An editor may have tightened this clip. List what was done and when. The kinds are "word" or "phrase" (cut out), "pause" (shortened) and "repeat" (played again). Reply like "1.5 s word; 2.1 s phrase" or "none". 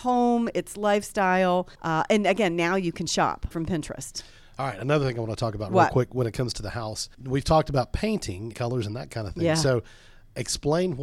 1.7 s pause; 3.5 s word; 7.1 s pause; 8.5 s phrase